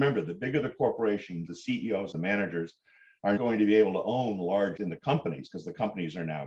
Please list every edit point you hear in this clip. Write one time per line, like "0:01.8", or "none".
0:01.5
0:02.1
0:03.4
0:04.8